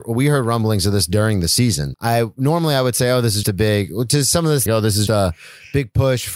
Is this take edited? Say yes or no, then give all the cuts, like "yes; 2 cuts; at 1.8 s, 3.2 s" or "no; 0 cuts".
yes; 4 cuts; at 1.9 s, 3.4 s, 4.7 s, 5.1 s